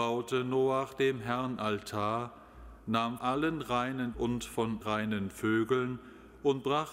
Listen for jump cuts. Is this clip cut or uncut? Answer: cut